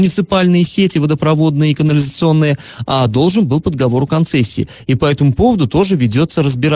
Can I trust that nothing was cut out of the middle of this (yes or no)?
yes